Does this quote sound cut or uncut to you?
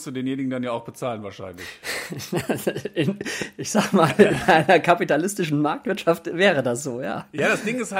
uncut